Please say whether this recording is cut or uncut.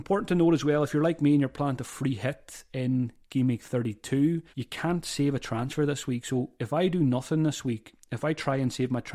cut